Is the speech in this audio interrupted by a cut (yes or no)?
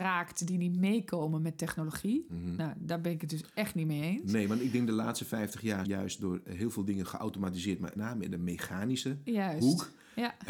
yes